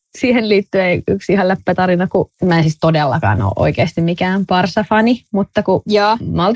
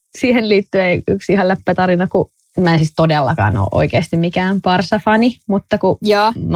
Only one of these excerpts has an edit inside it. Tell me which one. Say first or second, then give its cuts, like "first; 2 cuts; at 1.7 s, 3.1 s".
first; 1 cut; at 2.3 s